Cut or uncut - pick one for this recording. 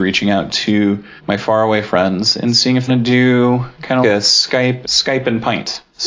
cut